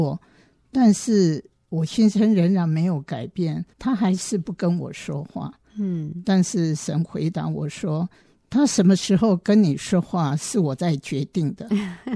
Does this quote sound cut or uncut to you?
cut